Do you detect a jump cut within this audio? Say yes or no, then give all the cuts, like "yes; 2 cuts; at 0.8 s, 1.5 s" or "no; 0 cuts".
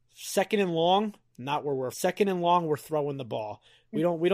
yes; 2 cuts; at 1.3 s, 1.9 s